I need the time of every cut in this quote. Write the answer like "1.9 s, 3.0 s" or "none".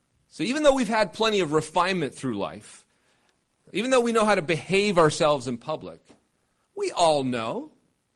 none